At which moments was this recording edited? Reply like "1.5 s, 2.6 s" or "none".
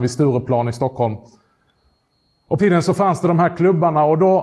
2.6 s